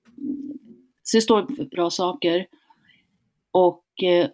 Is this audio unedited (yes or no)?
no